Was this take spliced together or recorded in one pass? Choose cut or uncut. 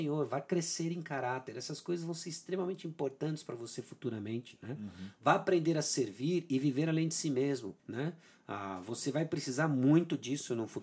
cut